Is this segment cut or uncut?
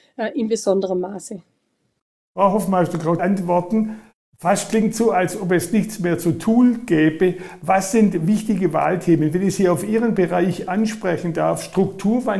cut